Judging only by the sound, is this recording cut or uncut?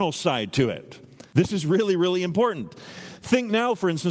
cut